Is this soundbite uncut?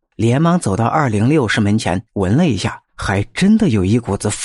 no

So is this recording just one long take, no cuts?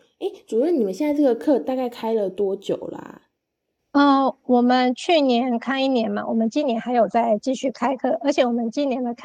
yes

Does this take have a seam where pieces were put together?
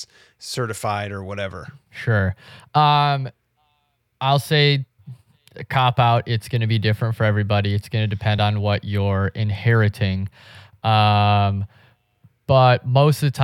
no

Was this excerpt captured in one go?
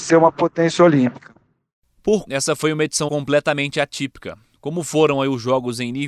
no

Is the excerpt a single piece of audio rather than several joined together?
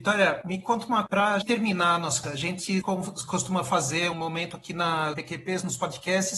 no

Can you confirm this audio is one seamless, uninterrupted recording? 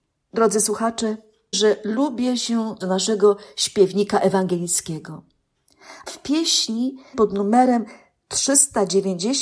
no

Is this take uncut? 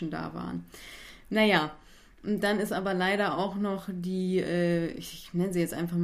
yes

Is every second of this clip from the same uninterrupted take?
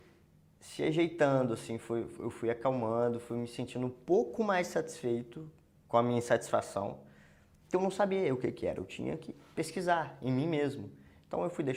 yes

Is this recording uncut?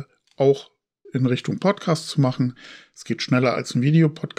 no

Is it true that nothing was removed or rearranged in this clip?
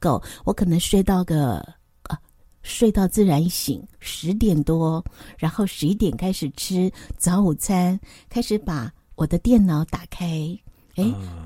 no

